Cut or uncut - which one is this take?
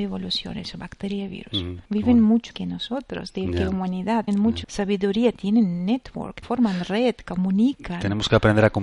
cut